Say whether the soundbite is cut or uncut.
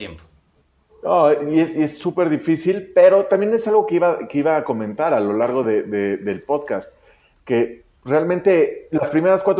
uncut